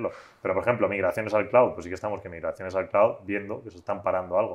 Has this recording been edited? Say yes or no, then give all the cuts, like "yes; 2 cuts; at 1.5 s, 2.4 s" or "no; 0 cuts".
no; 0 cuts